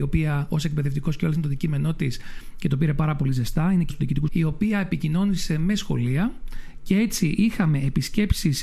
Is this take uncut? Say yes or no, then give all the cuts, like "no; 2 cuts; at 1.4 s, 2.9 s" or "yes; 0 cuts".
no; 2 cuts; at 3.9 s, 4.3 s